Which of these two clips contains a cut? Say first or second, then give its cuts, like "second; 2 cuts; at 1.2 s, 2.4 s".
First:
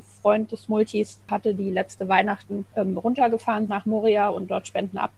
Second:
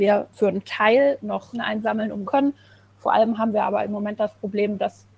second; 3 cuts; at 1.2 s, 1.5 s, 2.2 s